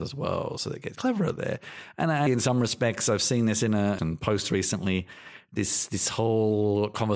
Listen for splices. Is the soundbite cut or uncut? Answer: cut